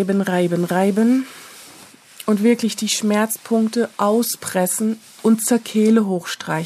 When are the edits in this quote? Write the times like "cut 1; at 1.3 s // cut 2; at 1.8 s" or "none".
none